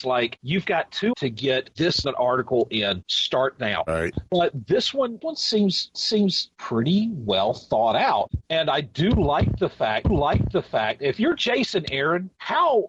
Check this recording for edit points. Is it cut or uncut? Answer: cut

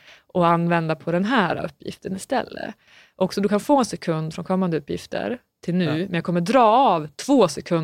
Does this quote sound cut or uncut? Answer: uncut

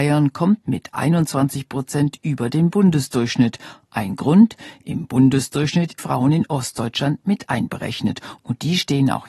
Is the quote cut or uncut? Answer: cut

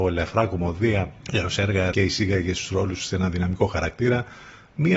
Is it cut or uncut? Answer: cut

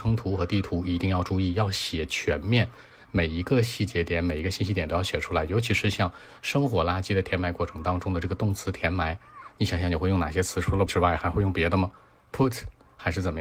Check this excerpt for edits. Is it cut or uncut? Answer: cut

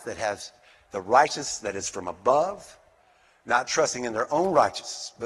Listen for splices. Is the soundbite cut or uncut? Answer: uncut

